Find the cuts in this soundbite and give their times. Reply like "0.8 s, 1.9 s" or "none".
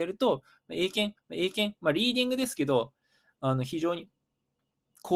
1.2 s